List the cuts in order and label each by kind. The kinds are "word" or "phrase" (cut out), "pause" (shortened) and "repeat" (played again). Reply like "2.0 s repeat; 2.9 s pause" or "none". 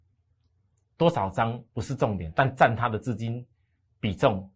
1.7 s pause